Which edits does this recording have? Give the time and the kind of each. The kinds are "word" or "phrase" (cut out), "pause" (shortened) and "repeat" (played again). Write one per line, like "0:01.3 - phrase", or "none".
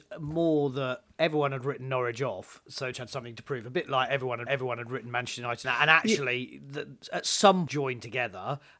0:01.1 - pause
0:02.9 - word
0:04.5 - repeat
0:05.6 - phrase
0:07.0 - word
0:07.7 - phrase

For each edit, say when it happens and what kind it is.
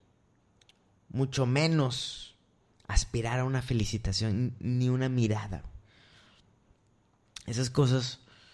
none

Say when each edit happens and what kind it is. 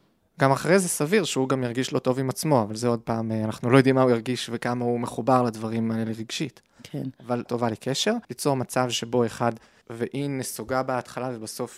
0:07.5 - phrase
0:08.2 - pause
0:09.8 - word

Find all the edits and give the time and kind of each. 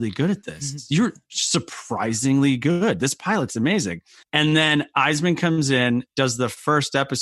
0:04.2 - pause

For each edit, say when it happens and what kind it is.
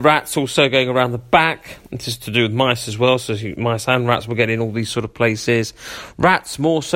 none

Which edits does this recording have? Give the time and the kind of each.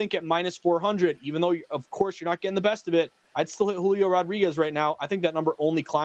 none

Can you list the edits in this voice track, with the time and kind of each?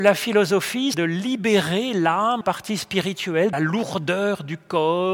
0:00.9 - word
0:02.4 - word
0:03.5 - word

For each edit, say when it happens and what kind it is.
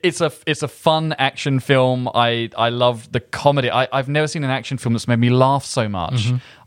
none

